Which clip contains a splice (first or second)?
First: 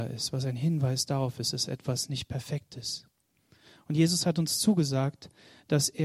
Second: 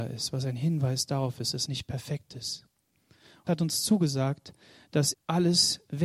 second